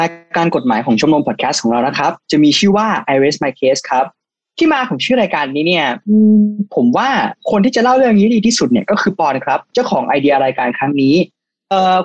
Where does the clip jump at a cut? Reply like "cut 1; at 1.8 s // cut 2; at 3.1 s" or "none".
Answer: none